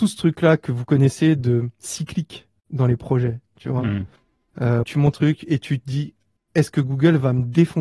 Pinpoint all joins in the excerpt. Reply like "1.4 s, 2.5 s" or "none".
4.8 s, 5.1 s